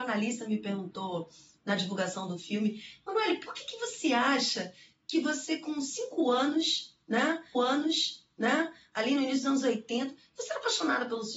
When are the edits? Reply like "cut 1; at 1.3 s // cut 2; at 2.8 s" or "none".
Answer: cut 1; at 7.5 s